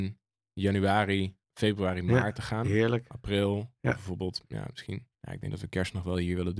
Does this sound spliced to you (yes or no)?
yes